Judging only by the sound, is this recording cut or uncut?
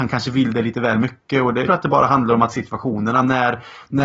cut